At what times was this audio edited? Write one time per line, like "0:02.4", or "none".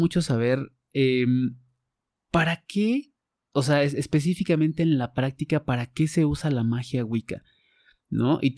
none